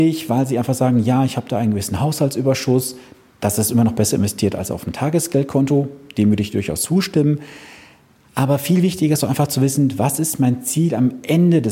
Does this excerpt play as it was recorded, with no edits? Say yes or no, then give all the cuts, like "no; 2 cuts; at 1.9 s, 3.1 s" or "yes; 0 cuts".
yes; 0 cuts